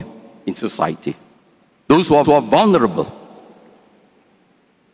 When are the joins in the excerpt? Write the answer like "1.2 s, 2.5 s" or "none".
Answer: 2.2 s